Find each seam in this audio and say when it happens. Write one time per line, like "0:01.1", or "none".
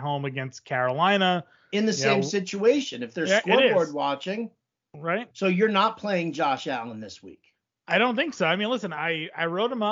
none

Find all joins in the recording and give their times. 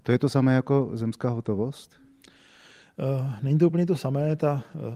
none

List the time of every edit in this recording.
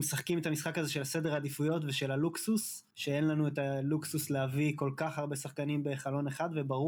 0:02.9

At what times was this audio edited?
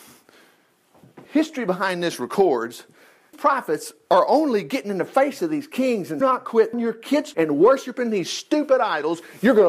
0:01.3
0:03.3
0:06.2
0:06.7
0:07.3

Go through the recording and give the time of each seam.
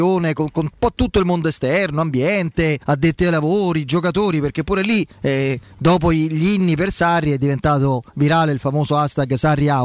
0:02.8
0:05.1

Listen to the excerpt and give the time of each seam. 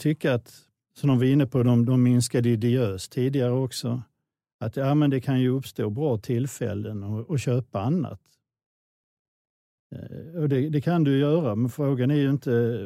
none

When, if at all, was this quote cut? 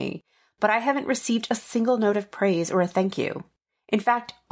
none

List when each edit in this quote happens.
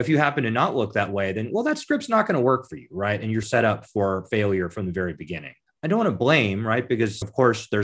0:05.7

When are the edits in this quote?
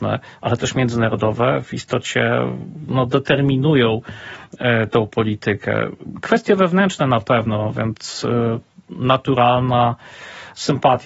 none

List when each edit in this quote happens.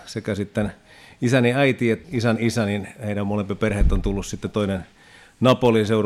0:02.0

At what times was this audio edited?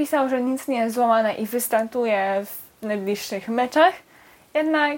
none

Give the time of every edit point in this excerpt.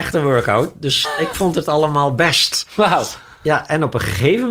0:01.0

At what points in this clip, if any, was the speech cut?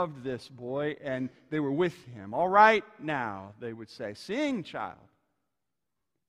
none

